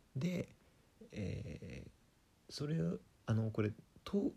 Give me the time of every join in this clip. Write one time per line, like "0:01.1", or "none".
none